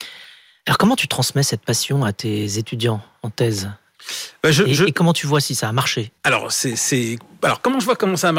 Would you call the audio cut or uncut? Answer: cut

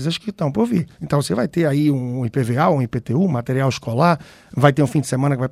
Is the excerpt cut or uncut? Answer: cut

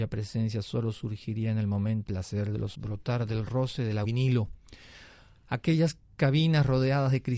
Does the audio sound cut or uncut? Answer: cut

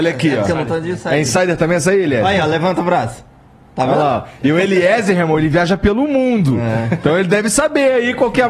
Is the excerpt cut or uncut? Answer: uncut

